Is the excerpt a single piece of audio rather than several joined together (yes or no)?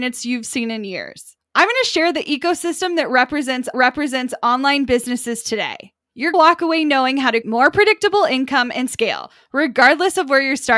no